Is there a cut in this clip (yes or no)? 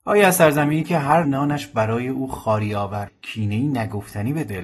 yes